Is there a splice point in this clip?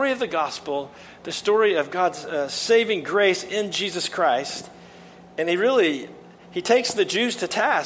no; 0 cuts

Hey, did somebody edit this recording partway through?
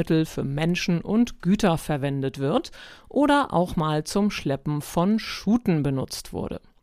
no; 0 cuts

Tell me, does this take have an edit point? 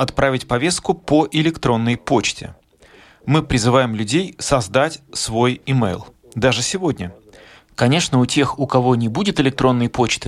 no; 0 cuts

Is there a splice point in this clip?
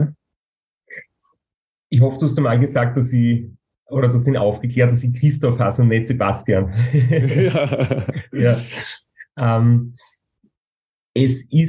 no; 0 cuts

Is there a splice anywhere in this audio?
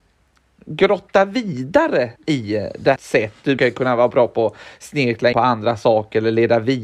yes; 4 cuts; at 2.2 s, 3.0 s, 3.6 s, 5.3 s

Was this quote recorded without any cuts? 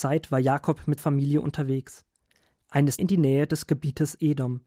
no; 2 cuts; at 1.0 s, 3.0 s

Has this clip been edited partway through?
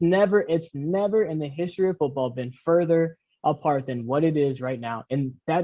no; 0 cuts

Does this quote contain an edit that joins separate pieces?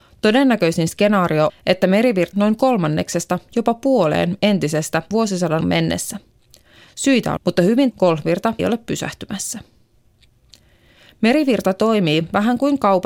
yes; 7 cuts; at 1.5 s, 2.3 s, 5.1 s, 5.6 s, 7.4 s, 7.9 s, 8.6 s

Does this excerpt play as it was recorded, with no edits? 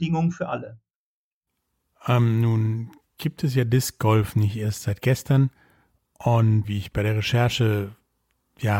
no; 1 cut; at 6.6 s

